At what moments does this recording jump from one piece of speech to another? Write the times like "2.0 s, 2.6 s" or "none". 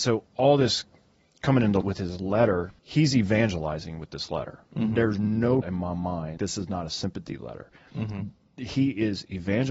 1.8 s, 2.8 s, 5.6 s, 6.4 s